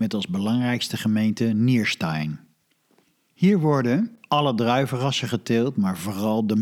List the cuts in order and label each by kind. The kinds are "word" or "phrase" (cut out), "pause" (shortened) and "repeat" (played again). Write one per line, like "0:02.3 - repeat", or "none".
none